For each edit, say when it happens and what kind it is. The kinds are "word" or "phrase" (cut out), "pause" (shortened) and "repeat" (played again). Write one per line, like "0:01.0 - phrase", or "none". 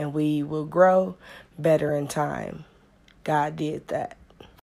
none